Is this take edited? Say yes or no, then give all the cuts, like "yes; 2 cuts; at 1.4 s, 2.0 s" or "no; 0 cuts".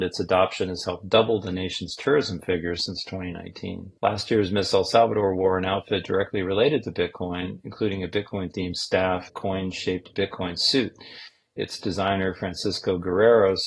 yes; 2 cuts; at 4.0 s, 9.3 s